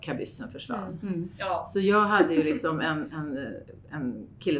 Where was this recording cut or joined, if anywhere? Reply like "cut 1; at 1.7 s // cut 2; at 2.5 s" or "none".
none